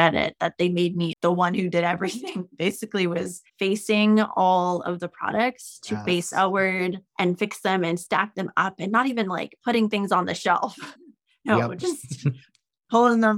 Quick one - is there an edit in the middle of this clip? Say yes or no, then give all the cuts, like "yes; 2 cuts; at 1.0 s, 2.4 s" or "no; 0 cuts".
yes; 3 cuts; at 3.5 s, 7.1 s, 11.0 s